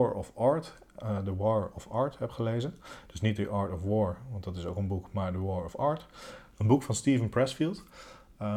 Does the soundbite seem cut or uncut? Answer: uncut